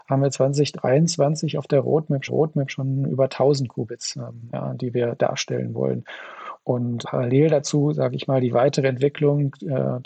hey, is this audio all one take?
no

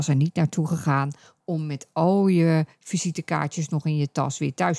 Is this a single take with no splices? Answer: yes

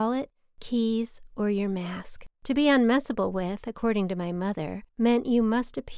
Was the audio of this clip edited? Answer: yes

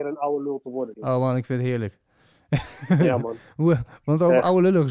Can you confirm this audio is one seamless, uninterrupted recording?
no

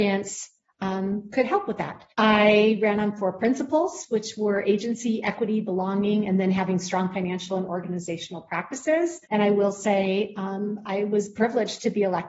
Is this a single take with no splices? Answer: no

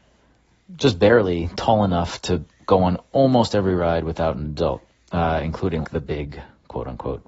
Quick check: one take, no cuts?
no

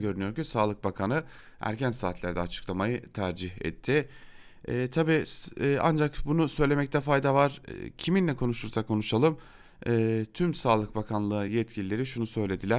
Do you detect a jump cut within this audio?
no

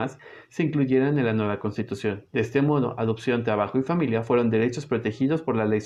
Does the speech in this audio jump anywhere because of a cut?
yes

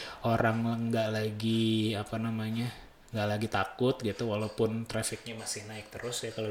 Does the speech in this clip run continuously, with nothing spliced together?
no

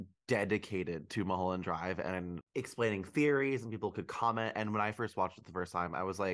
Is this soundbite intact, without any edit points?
yes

